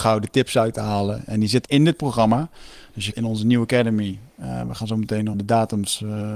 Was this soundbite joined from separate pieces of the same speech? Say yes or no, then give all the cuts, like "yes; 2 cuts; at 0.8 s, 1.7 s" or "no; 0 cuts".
yes; 3 cuts; at 1.6 s, 3.1 s, 5.3 s